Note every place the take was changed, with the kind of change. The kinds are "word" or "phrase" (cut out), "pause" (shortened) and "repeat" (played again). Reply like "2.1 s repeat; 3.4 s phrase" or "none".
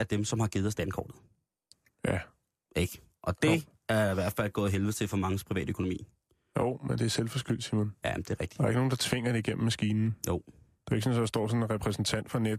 none